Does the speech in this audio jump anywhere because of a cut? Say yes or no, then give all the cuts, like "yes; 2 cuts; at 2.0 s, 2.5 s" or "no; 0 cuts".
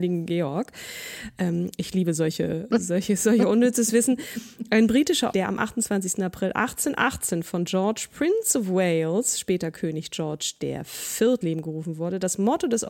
yes; 3 cuts; at 2.7 s, 5.3 s, 11.4 s